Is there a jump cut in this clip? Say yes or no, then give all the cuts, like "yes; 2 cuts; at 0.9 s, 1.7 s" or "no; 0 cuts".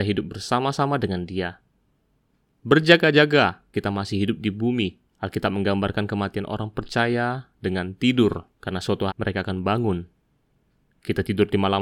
yes; 4 cuts; at 3.7 s, 5.1 s, 8.5 s, 9.1 s